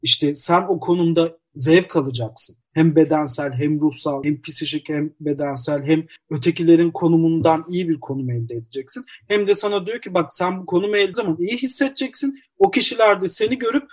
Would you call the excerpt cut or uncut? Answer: cut